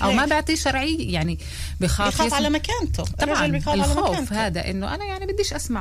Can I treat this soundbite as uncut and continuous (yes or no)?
yes